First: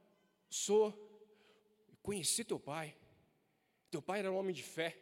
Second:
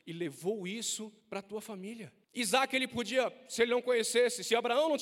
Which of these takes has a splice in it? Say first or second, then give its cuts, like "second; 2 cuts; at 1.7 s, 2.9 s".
second; 2 cuts; at 1.2 s, 2.2 s